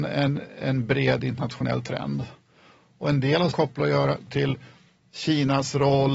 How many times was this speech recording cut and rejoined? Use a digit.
2